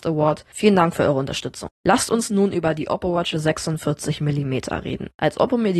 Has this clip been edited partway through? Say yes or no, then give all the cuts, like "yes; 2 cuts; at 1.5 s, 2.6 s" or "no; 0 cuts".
no; 0 cuts